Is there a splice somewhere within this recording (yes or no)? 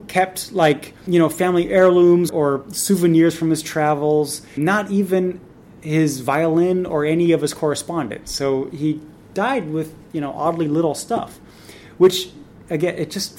yes